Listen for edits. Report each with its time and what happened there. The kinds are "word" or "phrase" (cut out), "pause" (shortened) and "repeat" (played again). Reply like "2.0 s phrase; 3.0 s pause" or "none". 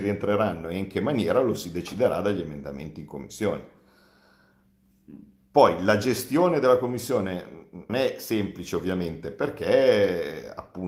7.9 s word